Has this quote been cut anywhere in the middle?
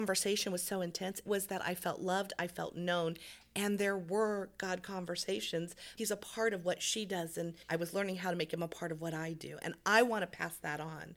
yes; 3 cuts; at 1.3 s, 6.0 s, 7.6 s

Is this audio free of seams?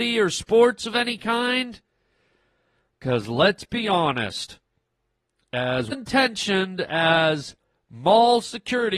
no; 1 cut; at 5.9 s

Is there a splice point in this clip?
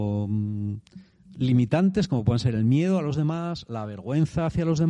no; 0 cuts

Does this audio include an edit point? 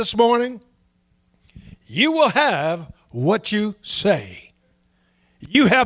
no; 0 cuts

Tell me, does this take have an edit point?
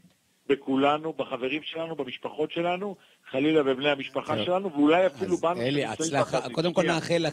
no; 0 cuts

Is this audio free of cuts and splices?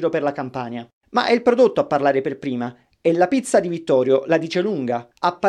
yes; 0 cuts

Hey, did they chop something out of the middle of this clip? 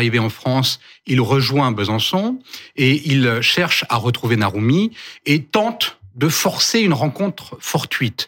no; 0 cuts

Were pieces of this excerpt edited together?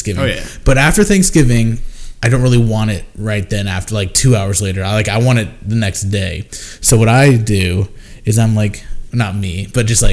yes; 1 cut; at 9.1 s

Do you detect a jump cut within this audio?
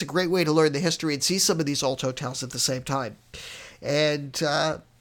no; 0 cuts

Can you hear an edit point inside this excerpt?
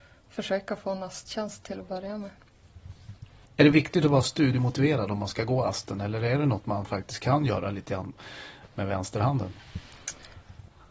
no; 0 cuts

